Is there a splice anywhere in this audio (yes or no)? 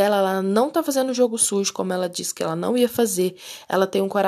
no